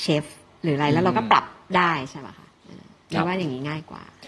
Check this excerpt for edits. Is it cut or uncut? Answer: uncut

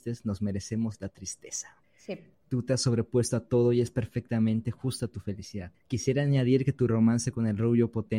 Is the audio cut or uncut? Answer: uncut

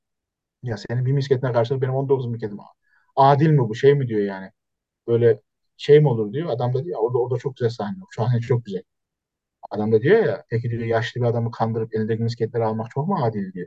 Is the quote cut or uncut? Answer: uncut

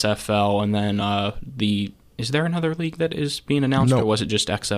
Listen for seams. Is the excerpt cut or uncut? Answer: uncut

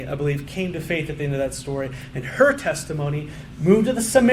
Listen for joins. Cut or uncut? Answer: uncut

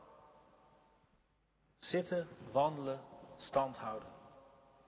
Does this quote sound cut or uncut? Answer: uncut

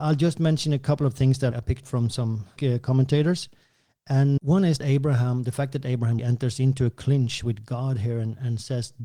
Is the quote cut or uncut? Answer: cut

